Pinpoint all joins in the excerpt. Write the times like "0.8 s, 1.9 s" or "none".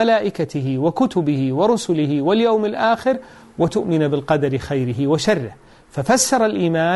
none